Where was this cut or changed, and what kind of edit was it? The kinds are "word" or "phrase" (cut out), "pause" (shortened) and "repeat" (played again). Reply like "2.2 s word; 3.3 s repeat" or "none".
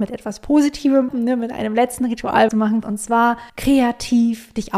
1.1 s word; 2.5 s word; 2.8 s word; 3.5 s pause

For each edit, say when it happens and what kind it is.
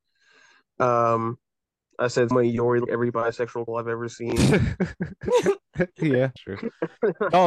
2.3 s word; 2.9 s word; 3.7 s word; 6.4 s word

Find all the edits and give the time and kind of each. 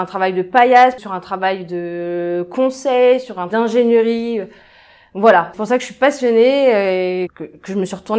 1.0 s word; 3.5 s word; 5.5 s word; 7.3 s word

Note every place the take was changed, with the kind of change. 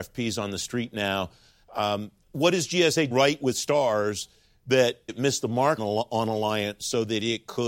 2.2 s word; 3.1 s word; 5.1 s word; 5.8 s word

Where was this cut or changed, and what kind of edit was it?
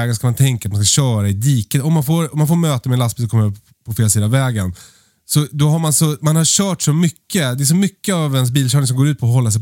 none

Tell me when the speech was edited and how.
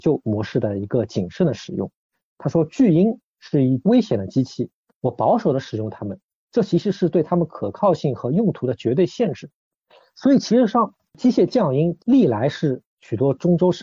none

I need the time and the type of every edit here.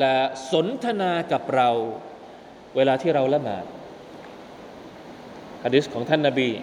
none

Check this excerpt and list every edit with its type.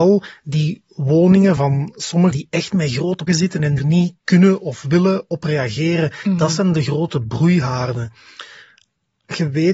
1.6 s word; 2.3 s word; 3.3 s word; 3.8 s word

